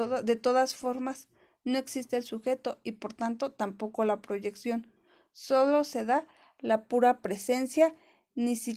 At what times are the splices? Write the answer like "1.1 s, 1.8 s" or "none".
none